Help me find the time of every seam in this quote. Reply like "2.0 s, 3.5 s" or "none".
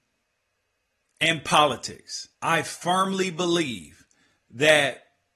2.3 s